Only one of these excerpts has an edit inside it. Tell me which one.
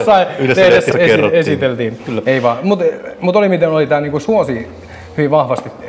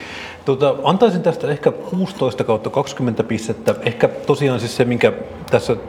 first; 1 cut; at 0.9 s

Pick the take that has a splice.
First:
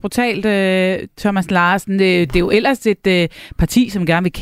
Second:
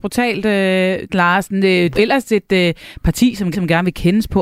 second; 3 cuts; at 1.1 s, 1.9 s, 3.5 s

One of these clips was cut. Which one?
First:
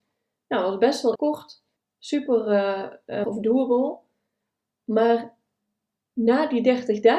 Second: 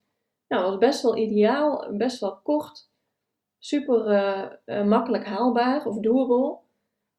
first; 3 cuts; at 1.2 s, 1.8 s, 3.2 s

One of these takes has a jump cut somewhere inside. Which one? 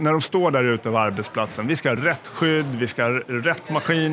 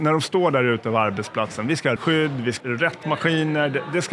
second; 2 cuts; at 2.0 s, 2.6 s

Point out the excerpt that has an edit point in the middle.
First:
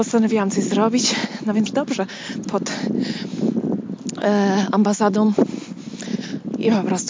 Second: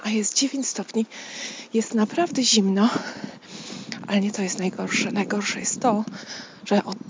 first; 2 cuts; at 1.7 s, 2.4 s

